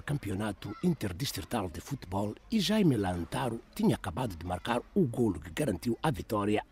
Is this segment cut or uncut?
cut